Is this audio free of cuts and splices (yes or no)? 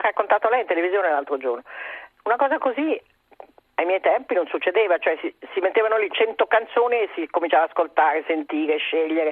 yes